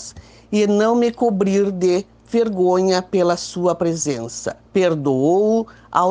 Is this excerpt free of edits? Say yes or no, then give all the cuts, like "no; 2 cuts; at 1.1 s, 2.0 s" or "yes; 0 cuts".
no; 1 cut; at 4.6 s